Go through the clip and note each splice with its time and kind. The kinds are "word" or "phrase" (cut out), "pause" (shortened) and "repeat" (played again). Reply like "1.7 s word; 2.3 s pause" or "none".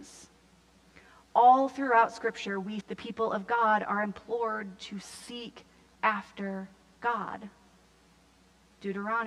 2.8 s word